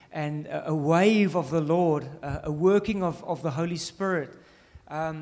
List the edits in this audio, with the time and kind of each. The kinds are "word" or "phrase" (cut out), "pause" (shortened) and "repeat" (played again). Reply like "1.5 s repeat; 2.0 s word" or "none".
none